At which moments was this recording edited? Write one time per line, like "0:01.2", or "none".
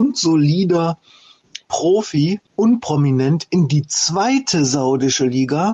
0:02.4